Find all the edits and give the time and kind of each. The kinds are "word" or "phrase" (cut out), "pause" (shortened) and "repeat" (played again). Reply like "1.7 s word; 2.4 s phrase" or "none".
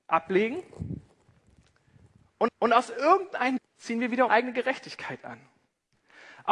2.5 s repeat; 3.6 s word; 4.3 s word